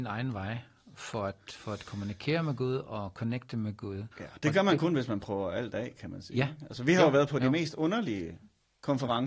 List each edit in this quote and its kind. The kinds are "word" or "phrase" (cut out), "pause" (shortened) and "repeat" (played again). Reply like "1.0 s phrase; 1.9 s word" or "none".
4.1 s pause